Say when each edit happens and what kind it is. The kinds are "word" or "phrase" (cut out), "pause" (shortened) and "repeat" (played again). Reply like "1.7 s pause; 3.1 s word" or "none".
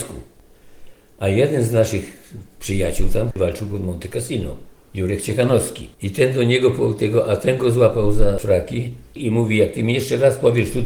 3.3 s word; 5.9 s pause